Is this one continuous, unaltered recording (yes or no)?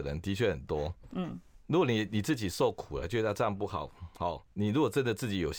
no